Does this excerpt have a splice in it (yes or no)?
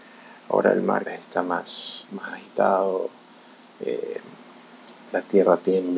yes